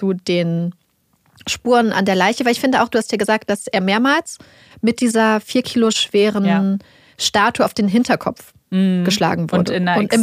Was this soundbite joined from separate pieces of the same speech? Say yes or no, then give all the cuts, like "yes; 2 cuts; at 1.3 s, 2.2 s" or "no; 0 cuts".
no; 0 cuts